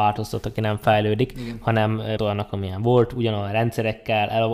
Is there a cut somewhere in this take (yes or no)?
yes